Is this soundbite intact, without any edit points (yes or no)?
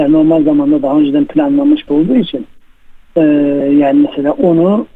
no